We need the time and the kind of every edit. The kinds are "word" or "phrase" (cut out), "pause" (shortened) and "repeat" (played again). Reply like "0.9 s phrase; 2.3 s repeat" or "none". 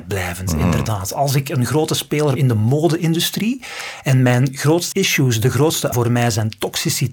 2.4 s word; 4.9 s word; 5.9 s word